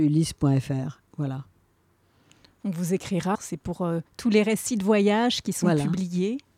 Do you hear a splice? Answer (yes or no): yes